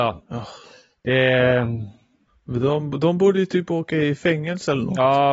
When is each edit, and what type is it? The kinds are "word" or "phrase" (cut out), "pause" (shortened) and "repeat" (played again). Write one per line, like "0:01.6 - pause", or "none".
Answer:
none